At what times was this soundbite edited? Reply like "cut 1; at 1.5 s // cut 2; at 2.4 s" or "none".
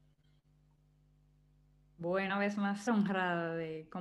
cut 1; at 2.3 s // cut 2; at 2.9 s